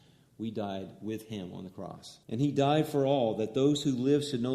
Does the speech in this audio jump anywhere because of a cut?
yes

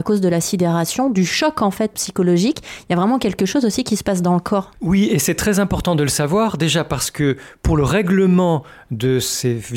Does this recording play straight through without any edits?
no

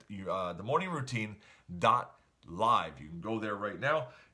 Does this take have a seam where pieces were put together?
no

